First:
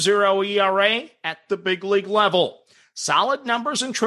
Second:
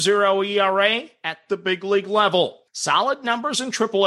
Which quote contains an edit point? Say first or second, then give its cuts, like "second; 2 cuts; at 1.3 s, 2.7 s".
second; 1 cut; at 2.7 s